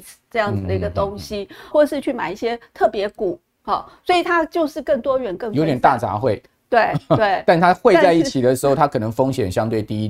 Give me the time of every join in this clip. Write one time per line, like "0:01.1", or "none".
0:01.7